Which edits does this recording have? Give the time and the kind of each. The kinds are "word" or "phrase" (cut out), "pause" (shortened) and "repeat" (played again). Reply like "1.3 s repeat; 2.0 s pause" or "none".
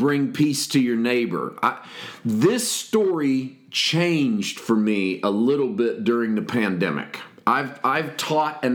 none